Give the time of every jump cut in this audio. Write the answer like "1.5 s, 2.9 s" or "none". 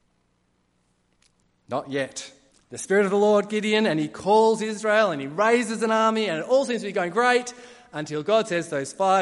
2.5 s, 3.5 s